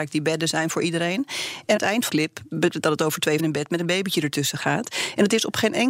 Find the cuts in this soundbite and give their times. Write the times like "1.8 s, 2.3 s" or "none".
1.8 s, 2.1 s, 2.7 s, 3.4 s